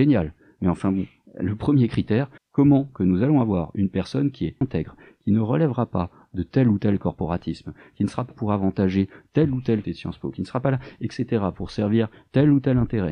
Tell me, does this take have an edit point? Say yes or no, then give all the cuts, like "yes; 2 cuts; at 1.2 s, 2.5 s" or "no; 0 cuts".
yes; 5 cuts; at 2.4 s, 2.9 s, 4.6 s, 8.3 s, 9.8 s